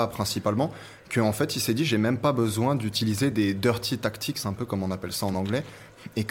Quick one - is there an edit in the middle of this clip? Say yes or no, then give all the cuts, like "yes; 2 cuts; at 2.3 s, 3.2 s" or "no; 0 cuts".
no; 0 cuts